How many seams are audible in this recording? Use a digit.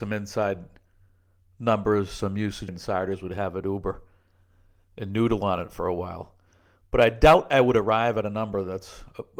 1